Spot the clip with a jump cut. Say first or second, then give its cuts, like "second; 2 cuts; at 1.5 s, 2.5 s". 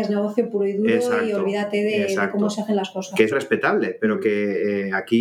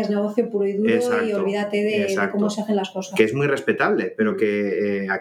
first; 1 cut; at 3.3 s